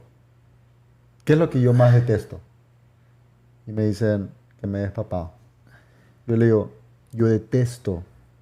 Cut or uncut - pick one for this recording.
uncut